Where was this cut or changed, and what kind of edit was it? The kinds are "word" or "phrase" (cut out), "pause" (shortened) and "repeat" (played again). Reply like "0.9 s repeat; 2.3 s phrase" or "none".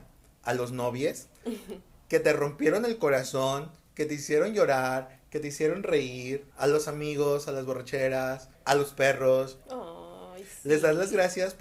6.5 s pause; 8.5 s pause; 9.6 s pause